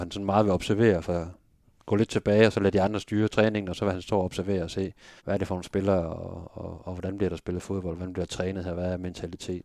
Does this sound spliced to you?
yes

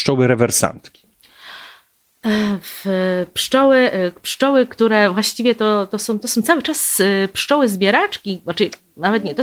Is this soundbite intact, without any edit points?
yes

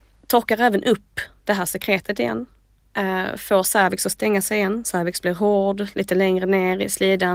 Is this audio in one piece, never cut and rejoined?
yes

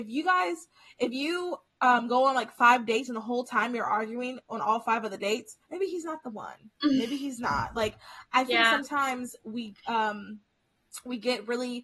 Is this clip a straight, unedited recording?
no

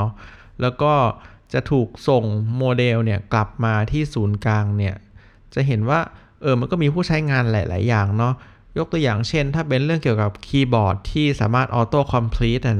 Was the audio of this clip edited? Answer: no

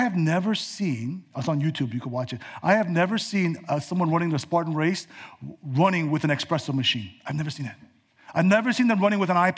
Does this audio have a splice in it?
yes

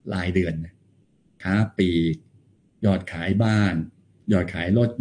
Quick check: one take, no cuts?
yes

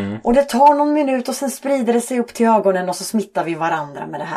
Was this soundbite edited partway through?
no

